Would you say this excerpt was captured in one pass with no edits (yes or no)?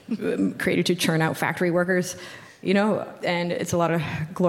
no